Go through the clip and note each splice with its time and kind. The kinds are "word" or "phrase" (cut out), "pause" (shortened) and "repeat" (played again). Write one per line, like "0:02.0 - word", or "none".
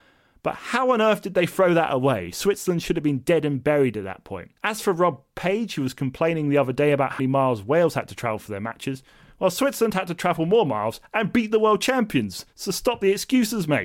0:04.6 - pause
0:07.2 - word